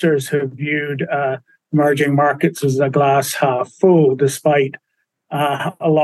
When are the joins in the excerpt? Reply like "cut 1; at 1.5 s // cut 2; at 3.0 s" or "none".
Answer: none